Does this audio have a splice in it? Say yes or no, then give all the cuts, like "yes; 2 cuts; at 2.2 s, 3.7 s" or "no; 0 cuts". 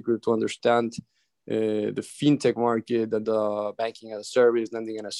yes; 1 cut; at 3.2 s